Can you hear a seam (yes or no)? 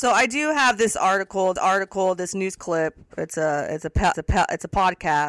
yes